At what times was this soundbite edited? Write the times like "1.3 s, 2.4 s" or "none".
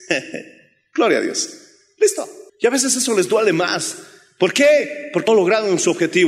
2.5 s, 5.3 s